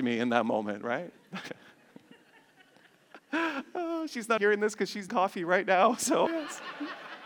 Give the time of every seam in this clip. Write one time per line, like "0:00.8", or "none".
0:04.4
0:05.1
0:06.3